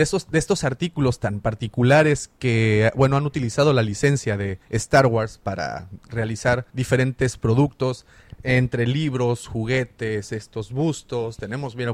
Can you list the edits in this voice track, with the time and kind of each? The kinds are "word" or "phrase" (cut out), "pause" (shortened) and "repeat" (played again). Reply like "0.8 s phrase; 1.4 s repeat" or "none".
4.6 s pause; 6.7 s pause